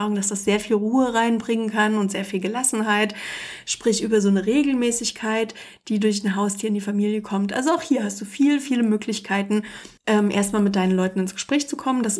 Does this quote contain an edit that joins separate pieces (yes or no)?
yes